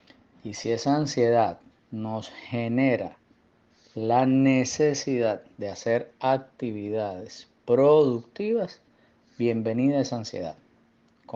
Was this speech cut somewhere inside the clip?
no; 0 cuts

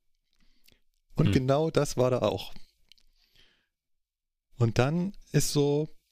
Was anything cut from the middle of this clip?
no; 0 cuts

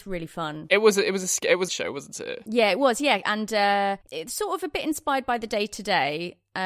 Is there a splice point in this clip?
yes; 3 cuts; at 1.7 s, 3.2 s, 4.0 s

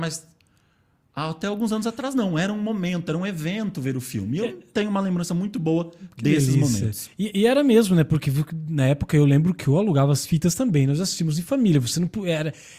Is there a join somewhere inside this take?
no; 0 cuts

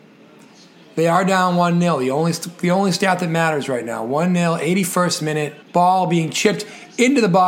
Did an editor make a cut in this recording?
yes; 1 cut; at 5.6 s

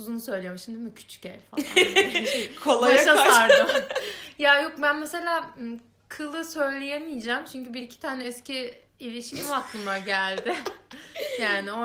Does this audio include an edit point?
no; 0 cuts

